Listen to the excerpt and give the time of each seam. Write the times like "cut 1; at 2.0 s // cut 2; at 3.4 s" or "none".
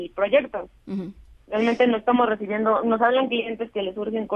cut 1; at 1.4 s